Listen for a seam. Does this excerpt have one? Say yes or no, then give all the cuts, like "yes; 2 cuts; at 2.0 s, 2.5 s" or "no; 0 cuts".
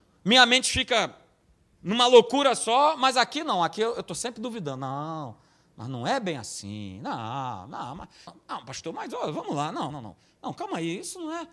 yes; 2 cuts; at 8.3 s, 9.9 s